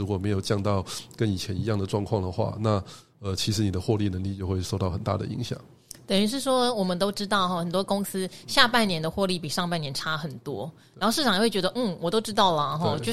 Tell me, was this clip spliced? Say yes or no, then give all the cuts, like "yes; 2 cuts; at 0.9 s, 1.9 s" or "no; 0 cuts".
no; 0 cuts